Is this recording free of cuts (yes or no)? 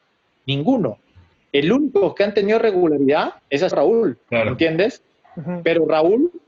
no